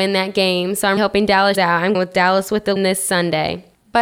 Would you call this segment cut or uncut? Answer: cut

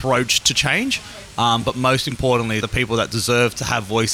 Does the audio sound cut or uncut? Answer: cut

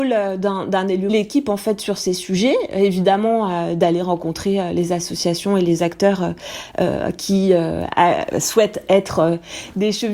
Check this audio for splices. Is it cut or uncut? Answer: cut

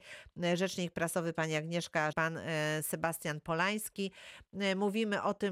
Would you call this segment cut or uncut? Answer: cut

